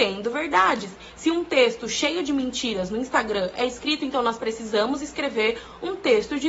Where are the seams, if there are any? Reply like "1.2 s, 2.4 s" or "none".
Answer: none